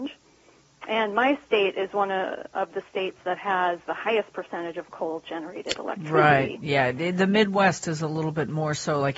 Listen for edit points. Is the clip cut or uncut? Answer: uncut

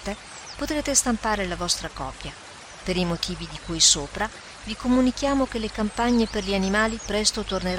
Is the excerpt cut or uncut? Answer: uncut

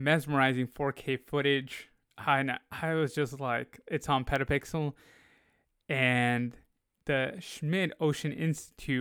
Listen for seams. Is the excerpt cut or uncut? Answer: uncut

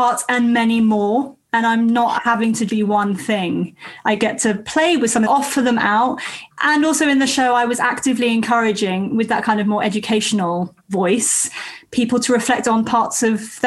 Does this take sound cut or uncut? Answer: cut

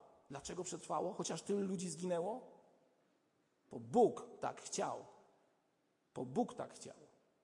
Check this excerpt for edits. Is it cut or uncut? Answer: uncut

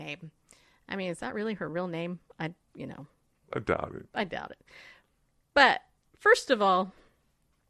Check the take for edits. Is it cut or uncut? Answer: uncut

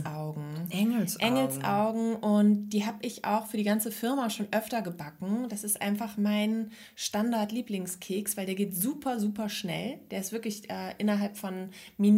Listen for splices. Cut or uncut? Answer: uncut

